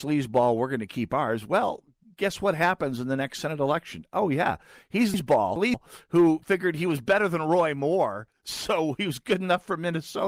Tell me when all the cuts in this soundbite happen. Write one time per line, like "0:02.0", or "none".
none